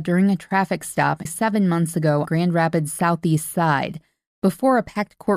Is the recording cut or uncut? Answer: cut